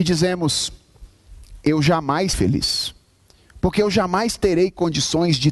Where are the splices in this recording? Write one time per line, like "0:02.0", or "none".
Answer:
0:02.3